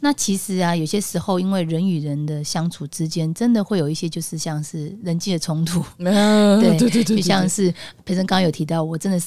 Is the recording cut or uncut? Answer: uncut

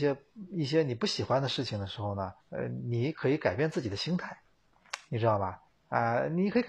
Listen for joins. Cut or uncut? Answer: cut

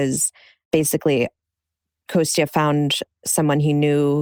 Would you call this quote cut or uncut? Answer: uncut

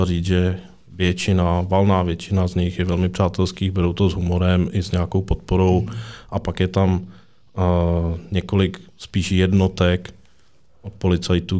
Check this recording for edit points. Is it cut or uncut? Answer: uncut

